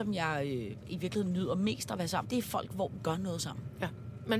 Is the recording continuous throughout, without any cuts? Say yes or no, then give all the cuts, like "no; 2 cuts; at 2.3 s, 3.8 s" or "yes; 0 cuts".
no; 2 cuts; at 2.2 s, 3.0 s